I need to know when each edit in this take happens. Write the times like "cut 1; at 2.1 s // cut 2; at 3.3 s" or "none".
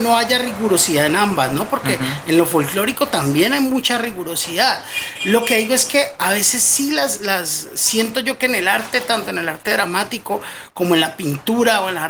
none